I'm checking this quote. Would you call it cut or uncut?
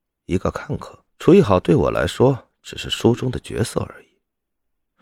cut